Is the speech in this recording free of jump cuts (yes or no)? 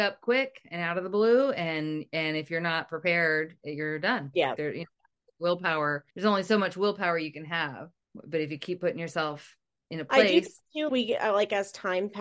no